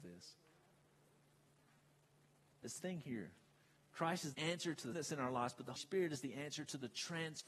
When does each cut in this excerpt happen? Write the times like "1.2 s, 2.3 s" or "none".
2.8 s, 4.3 s, 4.9 s, 5.8 s